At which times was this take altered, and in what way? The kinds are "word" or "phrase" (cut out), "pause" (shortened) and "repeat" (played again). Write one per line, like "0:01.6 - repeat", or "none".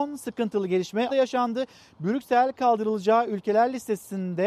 0:01.1 - word
0:02.5 - word